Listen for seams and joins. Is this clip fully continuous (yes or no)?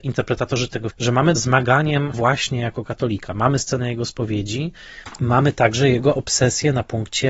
no